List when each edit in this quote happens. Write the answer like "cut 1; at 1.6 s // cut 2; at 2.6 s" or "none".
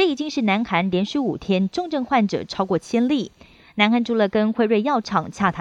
none